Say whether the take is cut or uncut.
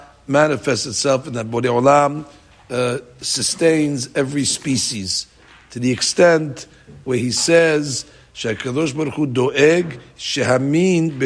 uncut